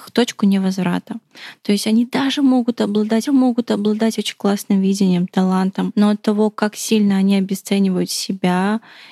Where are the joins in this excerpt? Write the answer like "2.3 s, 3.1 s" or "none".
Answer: 3.3 s